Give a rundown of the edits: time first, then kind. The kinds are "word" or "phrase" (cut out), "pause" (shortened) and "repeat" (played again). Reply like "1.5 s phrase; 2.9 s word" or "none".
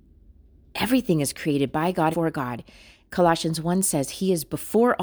2.1 s word